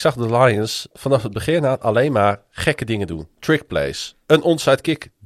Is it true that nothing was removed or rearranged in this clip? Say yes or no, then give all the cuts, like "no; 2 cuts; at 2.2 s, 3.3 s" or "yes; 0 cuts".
yes; 0 cuts